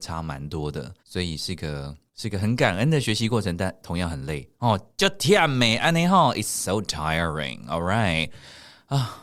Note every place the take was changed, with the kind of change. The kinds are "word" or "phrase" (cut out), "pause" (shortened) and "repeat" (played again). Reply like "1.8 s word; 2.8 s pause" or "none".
1.0 s pause; 2.1 s pause